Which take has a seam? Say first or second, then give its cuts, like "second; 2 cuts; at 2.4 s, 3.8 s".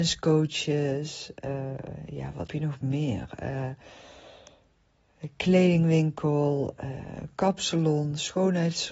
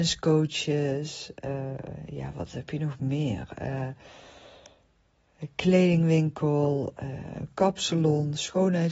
first; 1 cut; at 2.5 s